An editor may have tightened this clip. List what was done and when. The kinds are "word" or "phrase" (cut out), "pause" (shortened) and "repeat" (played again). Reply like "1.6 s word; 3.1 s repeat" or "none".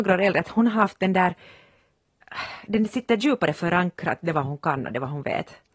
none